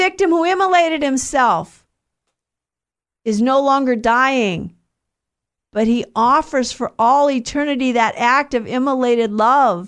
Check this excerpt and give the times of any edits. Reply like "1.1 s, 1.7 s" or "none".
none